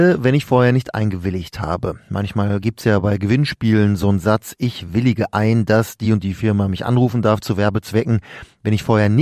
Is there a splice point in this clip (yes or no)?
no